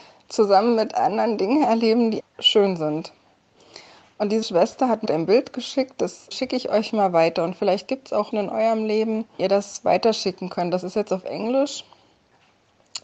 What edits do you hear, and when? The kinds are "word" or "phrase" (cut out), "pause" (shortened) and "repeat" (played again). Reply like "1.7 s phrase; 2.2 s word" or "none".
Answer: 2.2 s word; 4.4 s word; 5.1 s word; 6.3 s word; 8.3 s word; 9.4 s word

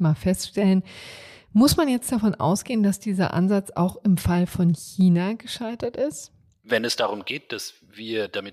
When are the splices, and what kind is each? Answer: none

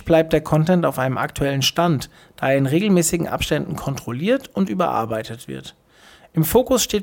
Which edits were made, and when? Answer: none

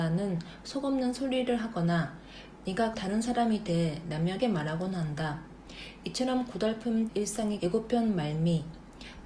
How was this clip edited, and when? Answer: 2.9 s word; 4.4 s word; 7.1 s word; 7.6 s word

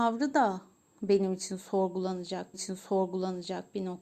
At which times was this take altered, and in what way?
2.5 s repeat

